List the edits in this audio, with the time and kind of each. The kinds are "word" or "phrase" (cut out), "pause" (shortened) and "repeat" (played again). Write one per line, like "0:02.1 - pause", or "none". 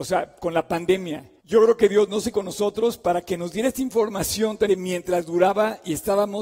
0:01.4 - pause
0:02.3 - word
0:04.7 - word